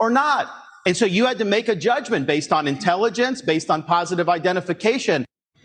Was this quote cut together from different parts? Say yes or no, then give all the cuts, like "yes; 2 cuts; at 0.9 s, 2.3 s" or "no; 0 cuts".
no; 0 cuts